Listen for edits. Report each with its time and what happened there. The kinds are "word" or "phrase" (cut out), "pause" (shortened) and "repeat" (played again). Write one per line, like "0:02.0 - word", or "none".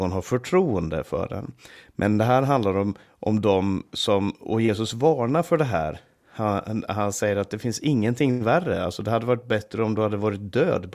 none